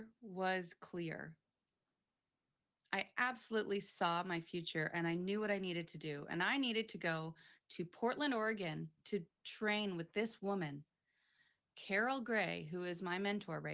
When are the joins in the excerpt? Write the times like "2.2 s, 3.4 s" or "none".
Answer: none